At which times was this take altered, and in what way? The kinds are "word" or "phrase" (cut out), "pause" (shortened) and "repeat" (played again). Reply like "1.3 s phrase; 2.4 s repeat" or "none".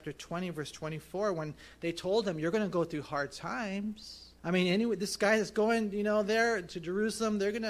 4.4 s pause